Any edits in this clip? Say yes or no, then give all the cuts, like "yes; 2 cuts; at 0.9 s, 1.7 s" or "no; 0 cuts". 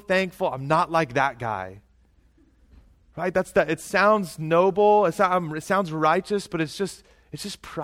no; 0 cuts